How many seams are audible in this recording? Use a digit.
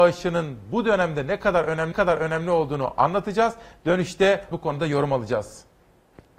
2